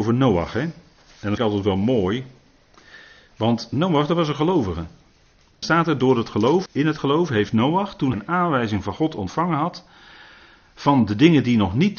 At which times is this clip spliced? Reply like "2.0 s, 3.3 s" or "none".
1.4 s, 5.6 s, 6.7 s, 8.1 s